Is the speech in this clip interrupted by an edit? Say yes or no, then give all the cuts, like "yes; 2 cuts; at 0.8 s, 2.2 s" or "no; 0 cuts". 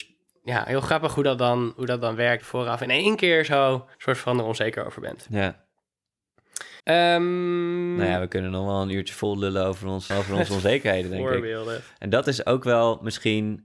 yes; 4 cuts; at 2.4 s, 3.9 s, 6.8 s, 10.1 s